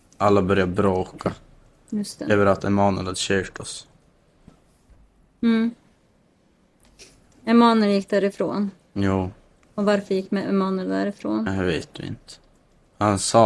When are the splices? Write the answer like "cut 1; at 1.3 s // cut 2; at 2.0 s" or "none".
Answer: none